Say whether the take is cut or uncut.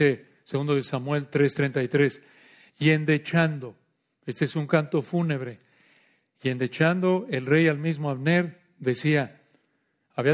uncut